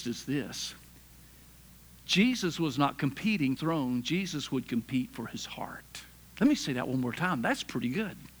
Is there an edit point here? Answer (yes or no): yes